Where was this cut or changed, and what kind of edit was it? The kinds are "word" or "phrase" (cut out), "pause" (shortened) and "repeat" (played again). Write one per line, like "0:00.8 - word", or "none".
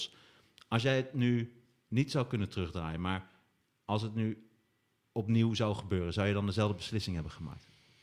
none